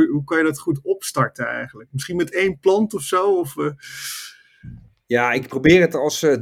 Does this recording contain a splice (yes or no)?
no